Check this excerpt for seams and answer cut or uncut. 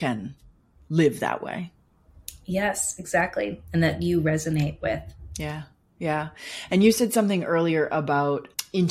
uncut